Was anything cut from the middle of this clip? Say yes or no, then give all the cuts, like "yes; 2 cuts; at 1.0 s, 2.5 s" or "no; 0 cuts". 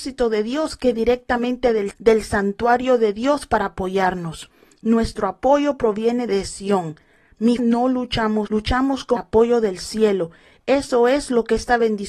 yes; 6 cuts; at 0.9 s, 1.9 s, 6.3 s, 7.6 s, 8.5 s, 9.2 s